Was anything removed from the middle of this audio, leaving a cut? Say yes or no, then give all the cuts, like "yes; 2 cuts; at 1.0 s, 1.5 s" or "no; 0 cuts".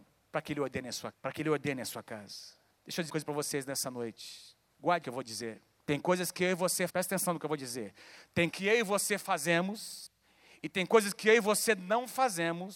yes; 5 cuts; at 1.1 s, 3.1 s, 5.0 s, 6.9 s, 8.5 s